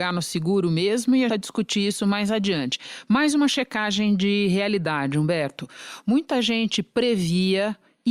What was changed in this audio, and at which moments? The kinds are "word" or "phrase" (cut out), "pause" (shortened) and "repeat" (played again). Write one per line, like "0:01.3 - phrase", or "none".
0:01.3 - phrase